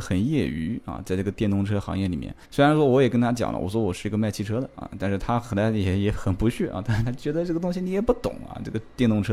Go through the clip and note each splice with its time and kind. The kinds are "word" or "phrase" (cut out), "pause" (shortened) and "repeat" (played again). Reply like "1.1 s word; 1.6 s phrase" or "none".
2.4 s pause